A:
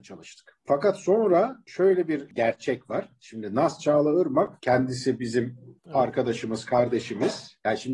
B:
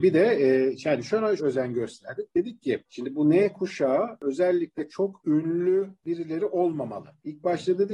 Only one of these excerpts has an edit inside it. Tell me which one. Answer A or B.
B